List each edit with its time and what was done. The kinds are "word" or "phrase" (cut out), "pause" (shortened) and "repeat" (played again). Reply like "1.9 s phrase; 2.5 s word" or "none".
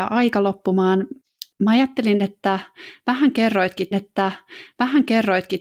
1.5 s pause; 3.9 s repeat